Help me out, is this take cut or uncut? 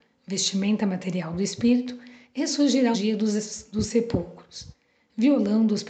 cut